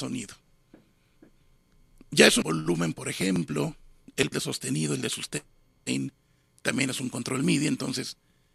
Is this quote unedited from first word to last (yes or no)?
no